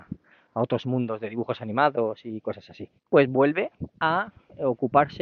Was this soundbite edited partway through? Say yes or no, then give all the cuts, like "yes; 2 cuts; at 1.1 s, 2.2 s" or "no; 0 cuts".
yes; 1 cut; at 3.0 s